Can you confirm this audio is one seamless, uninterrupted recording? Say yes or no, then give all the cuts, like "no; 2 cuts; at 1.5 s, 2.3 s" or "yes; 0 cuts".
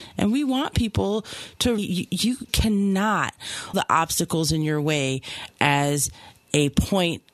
no; 3 cuts; at 1.8 s, 2.5 s, 3.7 s